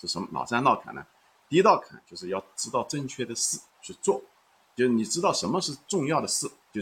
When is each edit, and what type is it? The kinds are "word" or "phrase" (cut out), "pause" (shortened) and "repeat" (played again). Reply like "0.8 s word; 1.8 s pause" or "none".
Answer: 3.7 s pause